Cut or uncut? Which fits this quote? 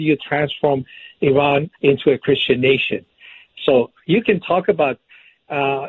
cut